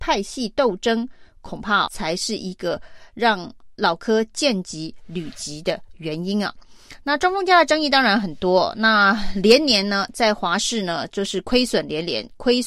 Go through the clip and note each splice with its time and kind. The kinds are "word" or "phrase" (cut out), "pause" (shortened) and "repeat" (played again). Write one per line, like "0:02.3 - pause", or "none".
0:01.9 - word